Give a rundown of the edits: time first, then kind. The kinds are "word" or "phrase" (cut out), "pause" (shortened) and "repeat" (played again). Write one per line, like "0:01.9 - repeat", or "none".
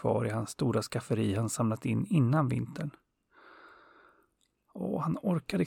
none